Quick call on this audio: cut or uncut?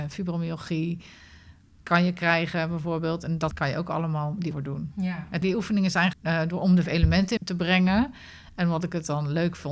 cut